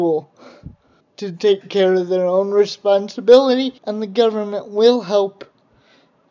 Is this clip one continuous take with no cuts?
no; 2 cuts; at 1.0 s, 3.8 s

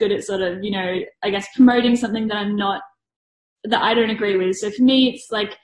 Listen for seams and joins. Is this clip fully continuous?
yes; 0 cuts

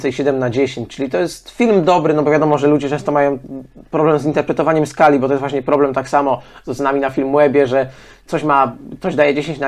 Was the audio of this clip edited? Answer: no; 0 cuts

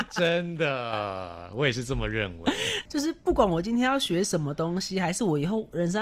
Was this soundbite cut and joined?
yes; 1 cut; at 2.9 s

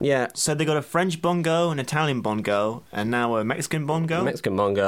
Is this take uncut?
yes; 0 cuts

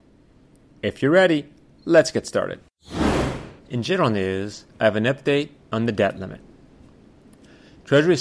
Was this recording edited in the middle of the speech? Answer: yes; 3 cuts; at 3.6 s, 4.7 s, 5.6 s

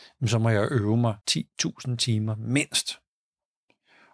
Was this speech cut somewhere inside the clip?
yes; 1 cut; at 1.2 s

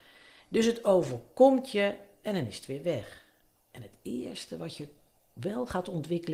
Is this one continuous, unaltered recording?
yes; 0 cuts

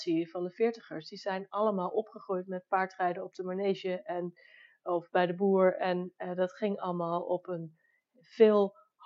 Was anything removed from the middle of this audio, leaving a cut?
no; 0 cuts

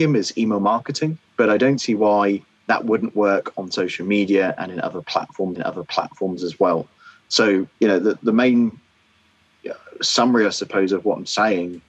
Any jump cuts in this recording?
yes; 3 cuts; at 1.3 s, 5.6 s, 7.7 s

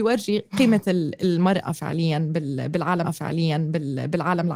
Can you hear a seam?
yes; 1 cut; at 3.0 s

